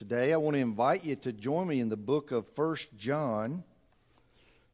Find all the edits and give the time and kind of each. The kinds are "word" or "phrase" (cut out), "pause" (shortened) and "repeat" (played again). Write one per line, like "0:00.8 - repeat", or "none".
none